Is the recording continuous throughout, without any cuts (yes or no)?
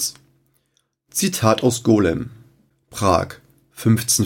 yes